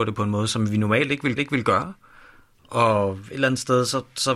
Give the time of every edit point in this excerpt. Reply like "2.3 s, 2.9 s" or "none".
1.4 s